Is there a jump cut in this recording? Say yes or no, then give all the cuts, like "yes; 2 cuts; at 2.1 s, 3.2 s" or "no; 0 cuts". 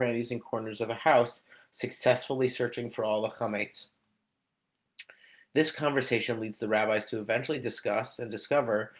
no; 0 cuts